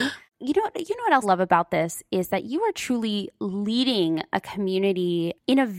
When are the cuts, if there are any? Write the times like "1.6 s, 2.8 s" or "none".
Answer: 1.2 s